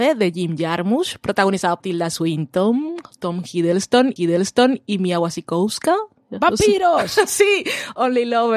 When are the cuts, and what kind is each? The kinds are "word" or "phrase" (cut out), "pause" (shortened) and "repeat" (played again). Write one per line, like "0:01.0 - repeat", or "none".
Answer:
0:01.8 - word
0:04.2 - repeat